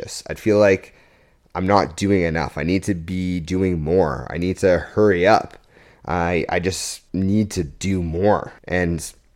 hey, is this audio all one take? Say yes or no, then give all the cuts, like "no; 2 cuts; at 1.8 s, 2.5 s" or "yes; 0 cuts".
yes; 0 cuts